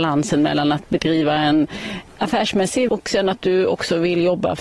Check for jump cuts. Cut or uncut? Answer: cut